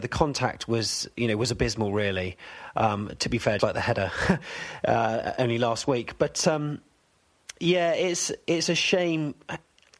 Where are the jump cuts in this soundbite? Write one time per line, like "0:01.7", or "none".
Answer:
0:03.6